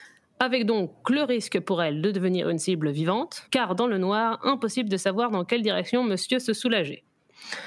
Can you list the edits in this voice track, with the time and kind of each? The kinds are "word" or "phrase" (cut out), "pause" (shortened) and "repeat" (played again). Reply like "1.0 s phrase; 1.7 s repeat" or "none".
none

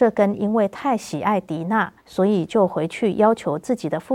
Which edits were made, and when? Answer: 2.0 s pause

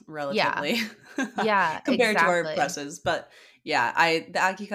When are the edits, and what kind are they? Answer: none

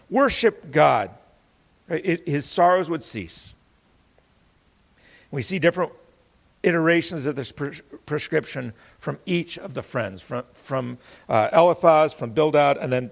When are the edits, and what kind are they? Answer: none

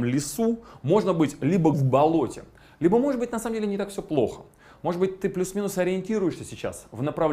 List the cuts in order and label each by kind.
1.7 s word

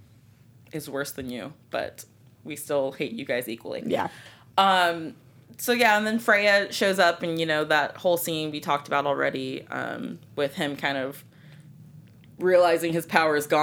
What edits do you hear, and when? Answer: none

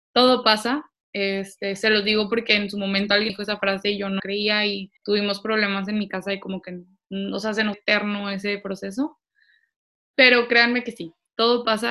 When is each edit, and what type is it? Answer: 3.3 s word; 4.2 s phrase; 5.0 s pause; 7.7 s word

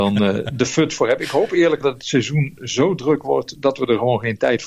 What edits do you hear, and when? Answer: 1.8 s word

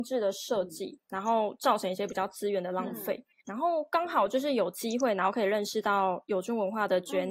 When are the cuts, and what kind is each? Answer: 3.4 s pause

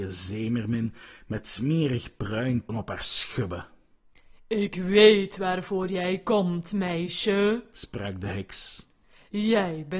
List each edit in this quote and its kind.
2.7 s phrase

